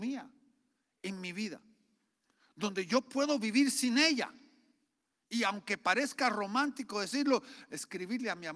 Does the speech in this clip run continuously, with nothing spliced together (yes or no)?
yes